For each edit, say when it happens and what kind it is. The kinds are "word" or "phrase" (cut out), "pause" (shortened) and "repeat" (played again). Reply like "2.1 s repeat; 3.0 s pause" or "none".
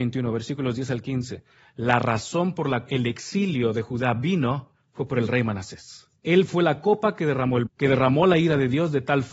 2.9 s word; 4.8 s pause; 6.2 s pause; 7.7 s word